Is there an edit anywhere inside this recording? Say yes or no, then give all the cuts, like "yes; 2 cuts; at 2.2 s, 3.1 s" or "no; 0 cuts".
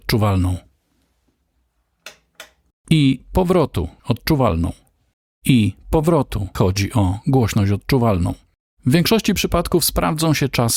yes; 4 cuts; at 2.7 s, 4.0 s, 5.1 s, 6.5 s